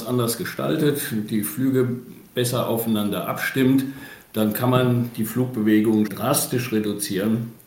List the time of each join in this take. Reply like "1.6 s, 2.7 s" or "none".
6.1 s